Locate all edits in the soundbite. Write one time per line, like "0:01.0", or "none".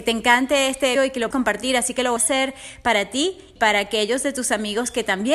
0:01.0
0:01.3
0:02.2
0:03.6